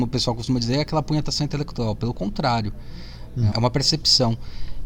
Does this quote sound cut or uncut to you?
cut